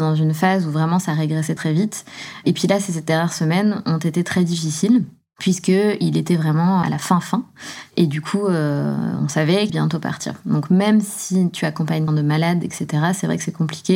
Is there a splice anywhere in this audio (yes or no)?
yes